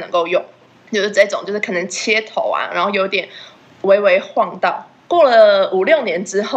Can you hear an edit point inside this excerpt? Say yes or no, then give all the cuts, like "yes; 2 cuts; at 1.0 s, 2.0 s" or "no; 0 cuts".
no; 0 cuts